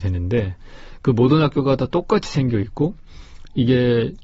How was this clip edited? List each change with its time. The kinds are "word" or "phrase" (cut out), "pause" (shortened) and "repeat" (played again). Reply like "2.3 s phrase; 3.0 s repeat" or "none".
none